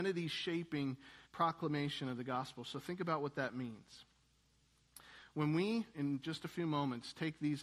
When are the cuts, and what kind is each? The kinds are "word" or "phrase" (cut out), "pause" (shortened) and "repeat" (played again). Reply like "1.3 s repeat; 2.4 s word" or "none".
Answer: 1.2 s pause; 5.9 s word